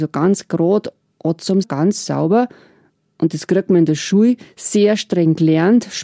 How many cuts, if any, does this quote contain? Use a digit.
1